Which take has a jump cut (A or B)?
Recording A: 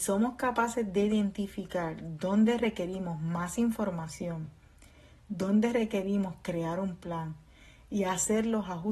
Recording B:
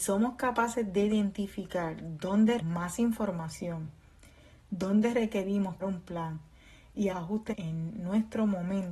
B